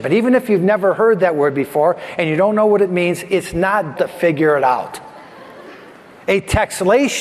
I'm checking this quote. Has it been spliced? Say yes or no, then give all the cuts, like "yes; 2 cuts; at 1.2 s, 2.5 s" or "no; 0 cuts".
yes; 1 cut; at 3.9 s